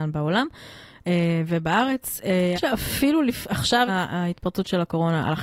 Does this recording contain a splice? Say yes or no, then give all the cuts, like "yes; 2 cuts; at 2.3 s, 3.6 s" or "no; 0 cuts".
yes; 2 cuts; at 2.5 s, 3.9 s